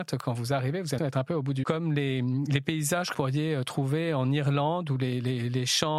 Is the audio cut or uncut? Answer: cut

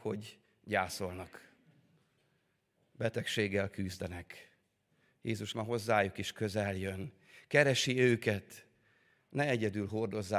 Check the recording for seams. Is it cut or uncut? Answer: cut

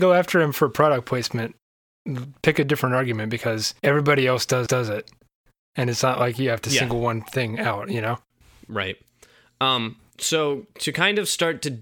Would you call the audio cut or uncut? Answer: cut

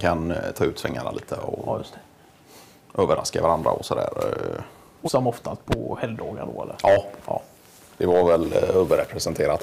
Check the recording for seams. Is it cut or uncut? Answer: cut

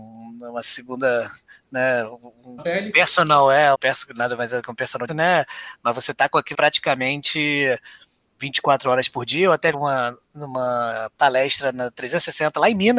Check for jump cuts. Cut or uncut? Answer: cut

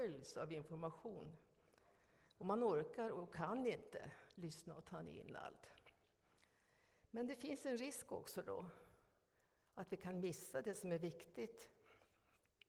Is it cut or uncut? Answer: uncut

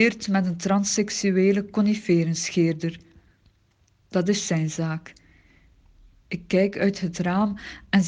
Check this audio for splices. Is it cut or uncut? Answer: uncut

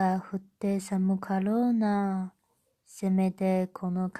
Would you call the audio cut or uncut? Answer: uncut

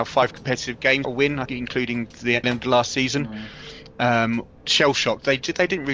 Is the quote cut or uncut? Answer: cut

